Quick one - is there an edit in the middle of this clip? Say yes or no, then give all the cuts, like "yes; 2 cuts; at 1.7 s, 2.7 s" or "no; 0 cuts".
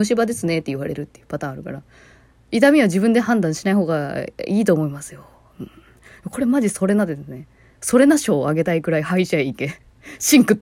no; 0 cuts